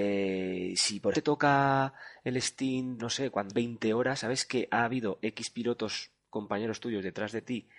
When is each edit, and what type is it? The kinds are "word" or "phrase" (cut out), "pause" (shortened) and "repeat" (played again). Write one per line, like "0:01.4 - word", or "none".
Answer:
0:01.1 - word
0:03.0 - word
0:03.5 - word